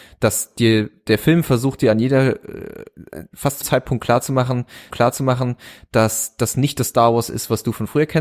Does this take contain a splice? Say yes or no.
yes